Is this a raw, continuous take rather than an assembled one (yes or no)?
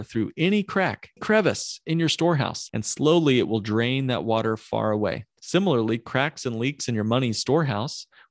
no